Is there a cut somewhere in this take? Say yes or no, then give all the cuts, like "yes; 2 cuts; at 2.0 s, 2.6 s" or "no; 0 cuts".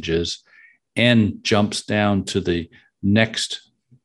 no; 0 cuts